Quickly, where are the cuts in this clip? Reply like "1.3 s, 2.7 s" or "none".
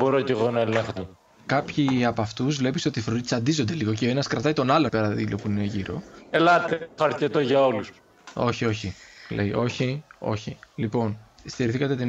1.0 s, 4.9 s, 7.0 s